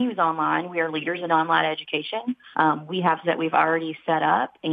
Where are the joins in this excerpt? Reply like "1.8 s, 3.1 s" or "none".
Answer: 2.5 s, 3.2 s